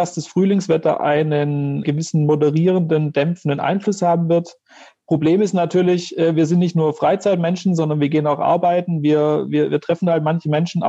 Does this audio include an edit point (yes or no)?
yes